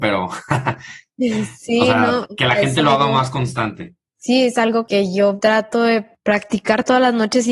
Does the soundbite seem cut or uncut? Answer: uncut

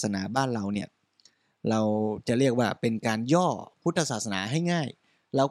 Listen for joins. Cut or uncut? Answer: uncut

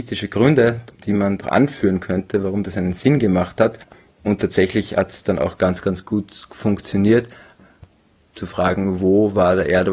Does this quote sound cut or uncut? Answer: uncut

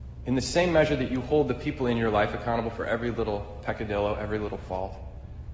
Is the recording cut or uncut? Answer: uncut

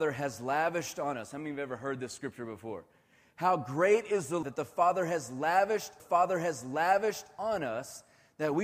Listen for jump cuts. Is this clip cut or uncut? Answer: cut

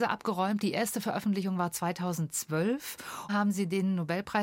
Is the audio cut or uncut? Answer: cut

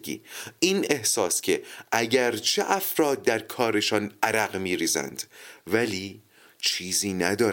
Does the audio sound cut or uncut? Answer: uncut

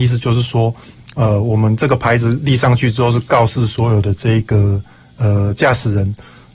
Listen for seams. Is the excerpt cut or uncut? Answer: uncut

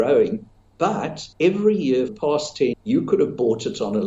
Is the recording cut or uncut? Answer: cut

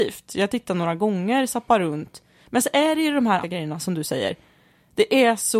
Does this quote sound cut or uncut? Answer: cut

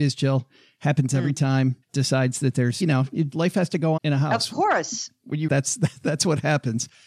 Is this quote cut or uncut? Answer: cut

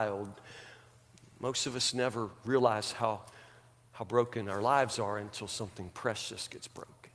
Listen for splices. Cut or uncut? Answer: uncut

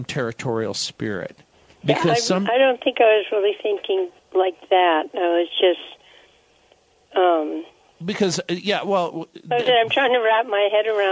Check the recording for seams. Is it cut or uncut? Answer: cut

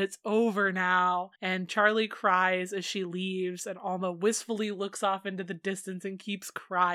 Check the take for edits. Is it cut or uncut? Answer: cut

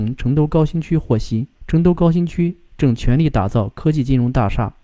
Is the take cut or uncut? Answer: cut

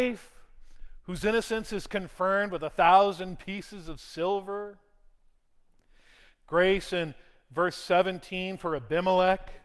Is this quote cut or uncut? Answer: uncut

